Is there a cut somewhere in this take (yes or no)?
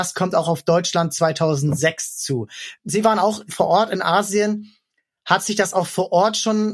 no